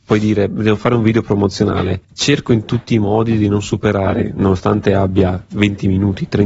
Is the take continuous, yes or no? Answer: no